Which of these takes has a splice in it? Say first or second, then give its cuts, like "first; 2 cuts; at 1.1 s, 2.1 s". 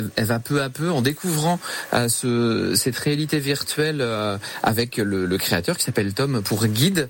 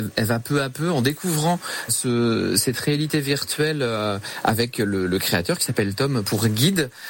second; 1 cut; at 1.9 s